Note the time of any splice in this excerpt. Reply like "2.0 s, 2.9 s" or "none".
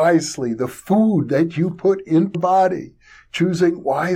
2.3 s